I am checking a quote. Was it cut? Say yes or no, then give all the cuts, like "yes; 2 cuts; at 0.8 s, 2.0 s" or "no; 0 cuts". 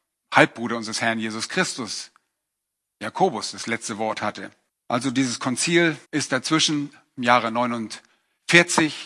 yes; 2 cuts; at 4.7 s, 6.0 s